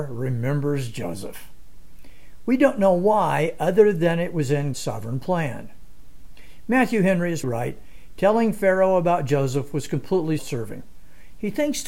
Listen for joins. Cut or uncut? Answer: cut